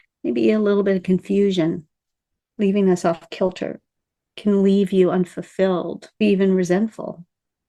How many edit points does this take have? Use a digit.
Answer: 1